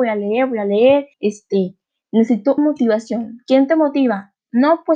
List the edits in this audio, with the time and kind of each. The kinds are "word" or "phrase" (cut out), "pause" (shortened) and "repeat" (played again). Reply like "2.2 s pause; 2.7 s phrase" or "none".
1.1 s pause; 2.6 s word